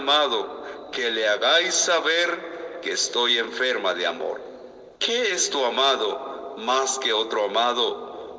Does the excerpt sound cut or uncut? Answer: cut